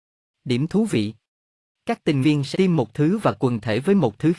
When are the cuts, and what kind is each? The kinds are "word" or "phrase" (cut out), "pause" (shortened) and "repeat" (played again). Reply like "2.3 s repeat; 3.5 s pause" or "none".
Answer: 2.2 s word; 2.5 s word